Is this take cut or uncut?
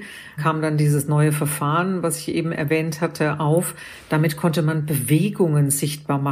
uncut